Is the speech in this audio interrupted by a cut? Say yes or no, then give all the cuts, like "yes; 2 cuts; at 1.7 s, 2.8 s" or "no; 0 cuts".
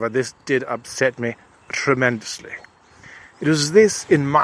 no; 0 cuts